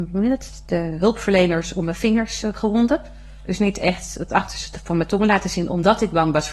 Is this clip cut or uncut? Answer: uncut